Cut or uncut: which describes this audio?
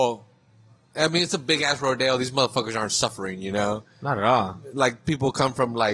uncut